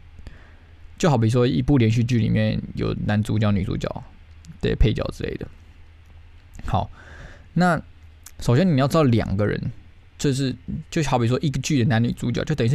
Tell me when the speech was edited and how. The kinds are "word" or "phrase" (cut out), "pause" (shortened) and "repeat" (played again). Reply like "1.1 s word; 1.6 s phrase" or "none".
8.3 s pause